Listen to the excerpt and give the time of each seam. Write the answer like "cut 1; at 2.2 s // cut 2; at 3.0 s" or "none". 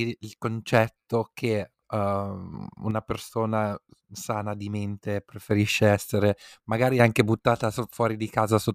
cut 1; at 1.8 s